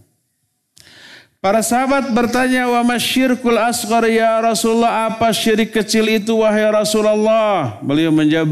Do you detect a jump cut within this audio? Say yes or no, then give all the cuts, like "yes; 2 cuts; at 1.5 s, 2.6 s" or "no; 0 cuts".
no; 0 cuts